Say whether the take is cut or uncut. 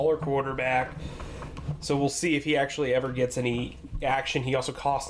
uncut